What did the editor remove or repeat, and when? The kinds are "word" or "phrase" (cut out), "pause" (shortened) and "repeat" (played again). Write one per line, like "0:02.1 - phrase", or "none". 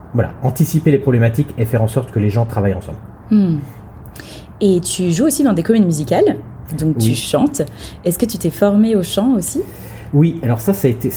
none